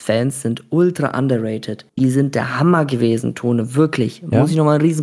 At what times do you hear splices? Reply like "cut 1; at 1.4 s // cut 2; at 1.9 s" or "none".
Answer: cut 1; at 1.9 s